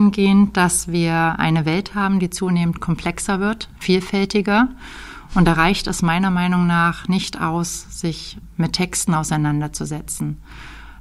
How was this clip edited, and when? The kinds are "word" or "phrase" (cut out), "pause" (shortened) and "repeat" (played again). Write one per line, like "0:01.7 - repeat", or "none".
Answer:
none

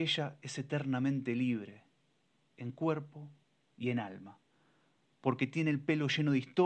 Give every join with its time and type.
none

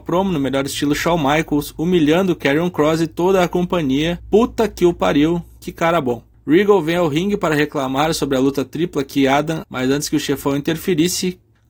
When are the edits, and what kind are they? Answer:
0:09.6 - word

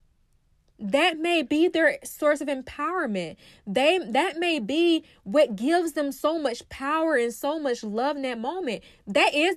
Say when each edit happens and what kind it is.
none

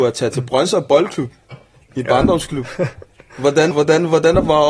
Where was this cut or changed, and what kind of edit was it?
0:03.7 - word

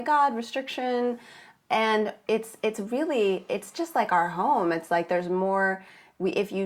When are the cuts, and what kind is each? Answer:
none

